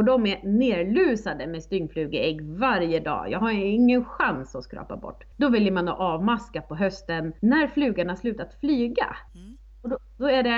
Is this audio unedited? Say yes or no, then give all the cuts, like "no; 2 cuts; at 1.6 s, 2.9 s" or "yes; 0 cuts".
no; 3 cuts; at 5.3 s, 7.4 s, 9.3 s